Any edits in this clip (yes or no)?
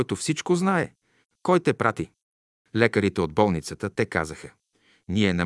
no